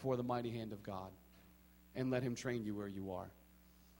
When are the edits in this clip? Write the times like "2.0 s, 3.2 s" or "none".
none

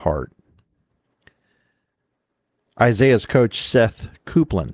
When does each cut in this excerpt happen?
none

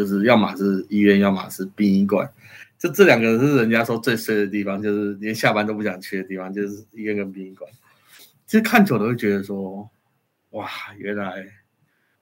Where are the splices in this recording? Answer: none

